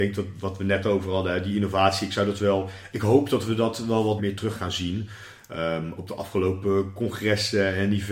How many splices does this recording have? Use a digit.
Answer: 3